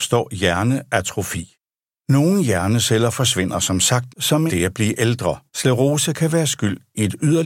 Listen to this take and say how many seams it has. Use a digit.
3